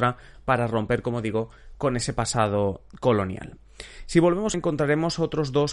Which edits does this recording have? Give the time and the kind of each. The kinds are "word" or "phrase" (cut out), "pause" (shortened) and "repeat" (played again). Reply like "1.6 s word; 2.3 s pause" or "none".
4.5 s phrase